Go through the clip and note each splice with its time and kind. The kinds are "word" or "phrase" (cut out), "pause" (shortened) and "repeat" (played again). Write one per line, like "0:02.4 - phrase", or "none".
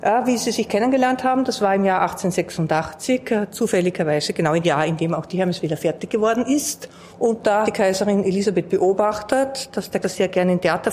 0:04.6 - word
0:07.1 - pause
0:07.6 - word
0:10.0 - word